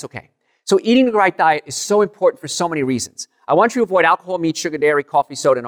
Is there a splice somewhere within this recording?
no; 0 cuts

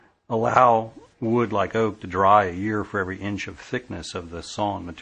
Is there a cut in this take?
yes; 1 cut; at 1.1 s

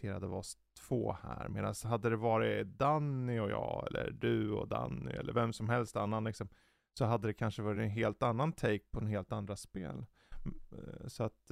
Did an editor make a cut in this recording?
no; 0 cuts

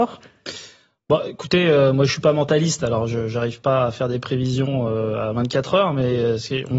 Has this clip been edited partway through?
no; 0 cuts

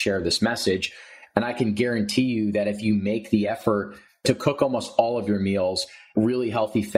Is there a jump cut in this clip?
no; 0 cuts

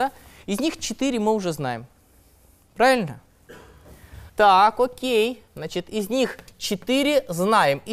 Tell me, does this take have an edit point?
yes; 2 cuts; at 4.3 s, 5.5 s

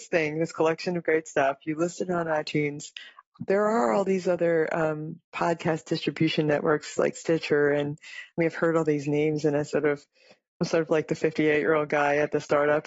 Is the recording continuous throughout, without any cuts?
yes; 0 cuts

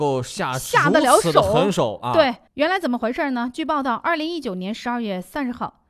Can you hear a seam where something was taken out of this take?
yes; 1 cut; at 2.5 s

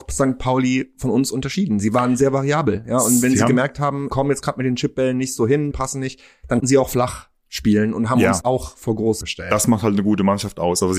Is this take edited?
yes; 5 cuts; at 4.1 s, 5.7 s, 6.6 s, 8.4 s, 9.2 s

